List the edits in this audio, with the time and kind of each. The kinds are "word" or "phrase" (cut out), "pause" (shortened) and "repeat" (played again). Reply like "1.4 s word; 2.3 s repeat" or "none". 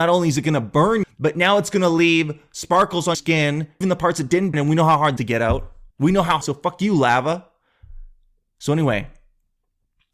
1.0 s word; 3.1 s word; 3.8 s word; 4.5 s word; 5.2 s phrase; 5.9 s pause; 6.4 s word